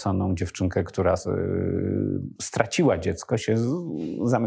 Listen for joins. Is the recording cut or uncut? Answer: uncut